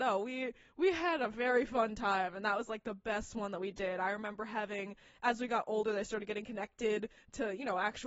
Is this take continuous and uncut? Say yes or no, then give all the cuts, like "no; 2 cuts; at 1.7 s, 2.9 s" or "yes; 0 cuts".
yes; 0 cuts